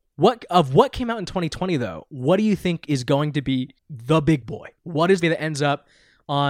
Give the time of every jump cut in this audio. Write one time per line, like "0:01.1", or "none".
0:03.8
0:04.8
0:05.2